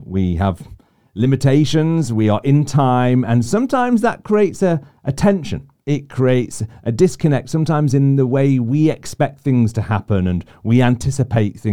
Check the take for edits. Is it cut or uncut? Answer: cut